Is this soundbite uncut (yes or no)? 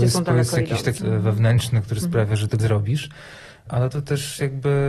no